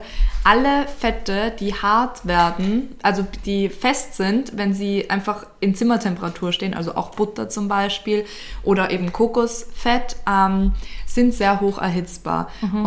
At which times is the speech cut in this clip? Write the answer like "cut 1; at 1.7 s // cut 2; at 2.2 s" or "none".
cut 1; at 3.4 s